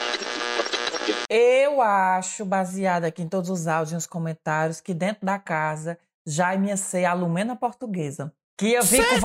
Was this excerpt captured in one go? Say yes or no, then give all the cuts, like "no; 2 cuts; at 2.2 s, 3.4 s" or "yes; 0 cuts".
yes; 0 cuts